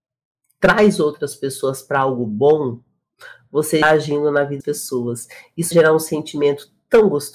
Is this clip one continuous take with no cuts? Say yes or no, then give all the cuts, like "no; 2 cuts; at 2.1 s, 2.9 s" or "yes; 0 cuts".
no; 3 cuts; at 3.8 s, 4.6 s, 5.7 s